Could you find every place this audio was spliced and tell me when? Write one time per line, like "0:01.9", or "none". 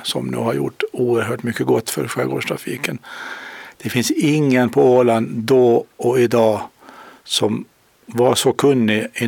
none